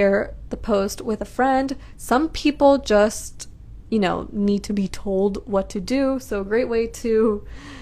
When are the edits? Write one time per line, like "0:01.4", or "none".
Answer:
none